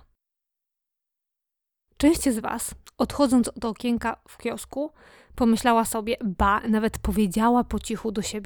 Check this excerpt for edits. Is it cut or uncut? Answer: uncut